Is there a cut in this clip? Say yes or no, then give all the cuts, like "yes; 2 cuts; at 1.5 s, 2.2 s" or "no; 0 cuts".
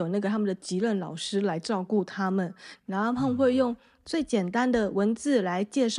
no; 0 cuts